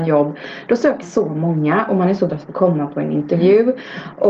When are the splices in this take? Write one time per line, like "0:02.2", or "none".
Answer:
0:01.0
0:02.3